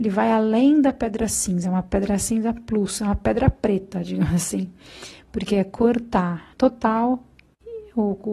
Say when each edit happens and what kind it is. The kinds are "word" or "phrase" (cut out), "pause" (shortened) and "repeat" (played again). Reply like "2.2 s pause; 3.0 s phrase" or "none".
6.5 s pause